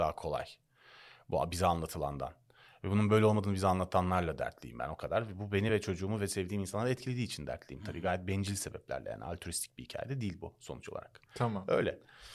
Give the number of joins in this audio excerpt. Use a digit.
0